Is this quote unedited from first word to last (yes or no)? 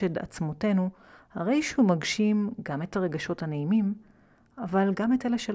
yes